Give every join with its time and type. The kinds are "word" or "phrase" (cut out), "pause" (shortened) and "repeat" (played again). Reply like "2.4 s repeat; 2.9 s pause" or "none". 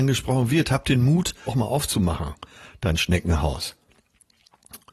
1.5 s phrase